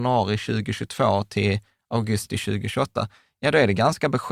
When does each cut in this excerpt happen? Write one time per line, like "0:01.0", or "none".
none